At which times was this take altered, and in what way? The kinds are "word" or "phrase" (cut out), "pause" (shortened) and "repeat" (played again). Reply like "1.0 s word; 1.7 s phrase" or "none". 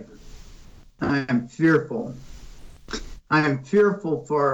none